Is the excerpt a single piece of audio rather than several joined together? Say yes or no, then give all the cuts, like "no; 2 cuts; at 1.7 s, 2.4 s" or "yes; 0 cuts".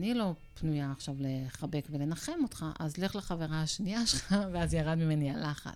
yes; 0 cuts